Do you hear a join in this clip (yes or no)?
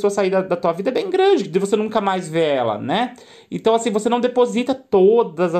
no